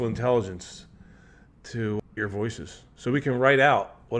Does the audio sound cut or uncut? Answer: cut